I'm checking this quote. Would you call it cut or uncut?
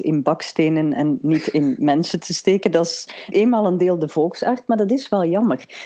cut